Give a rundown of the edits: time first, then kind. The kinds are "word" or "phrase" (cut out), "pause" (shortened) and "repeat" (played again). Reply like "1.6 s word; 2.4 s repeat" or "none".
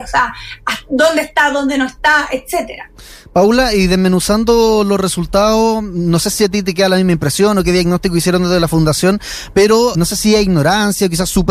9.9 s word